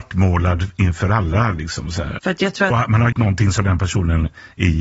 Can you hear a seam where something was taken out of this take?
yes; 3 cuts; at 2.2 s, 2.7 s, 3.1 s

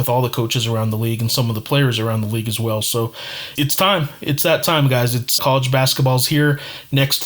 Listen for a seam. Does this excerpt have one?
yes; 2 cuts; at 3.6 s, 5.4 s

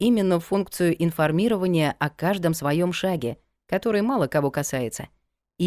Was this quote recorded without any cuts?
yes; 0 cuts

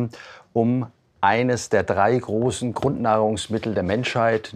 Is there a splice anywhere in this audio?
no; 0 cuts

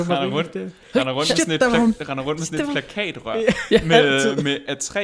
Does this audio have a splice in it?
no; 0 cuts

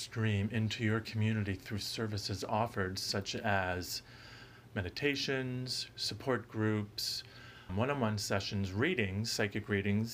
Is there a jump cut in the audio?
yes; 1 cut; at 7.7 s

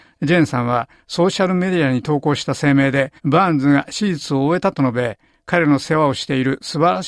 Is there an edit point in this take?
yes; 1 cut; at 3.2 s

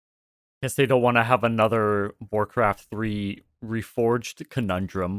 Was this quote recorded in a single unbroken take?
yes; 0 cuts

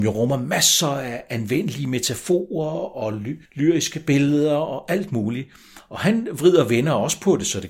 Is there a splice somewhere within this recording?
yes; 1 cut; at 3.4 s

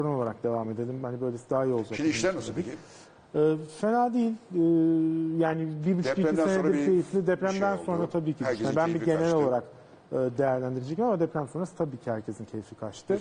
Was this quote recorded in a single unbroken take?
yes; 0 cuts

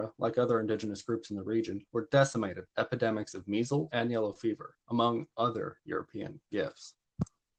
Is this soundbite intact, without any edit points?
no; 4 cuts; at 1.9 s, 2.7 s, 3.9 s, 6.4 s

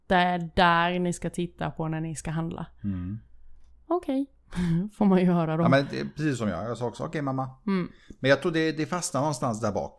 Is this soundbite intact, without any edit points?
no; 1 cut; at 3.7 s

